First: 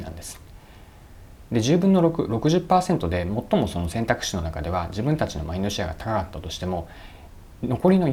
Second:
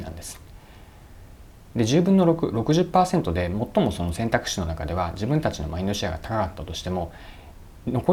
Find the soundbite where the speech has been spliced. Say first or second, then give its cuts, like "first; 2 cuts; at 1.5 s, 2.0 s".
first; 1 cut; at 1.5 s